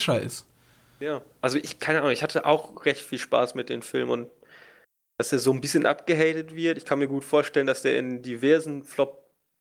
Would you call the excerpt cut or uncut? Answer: uncut